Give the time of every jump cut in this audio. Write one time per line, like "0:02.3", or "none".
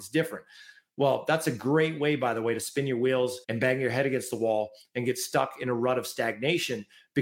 0:03.4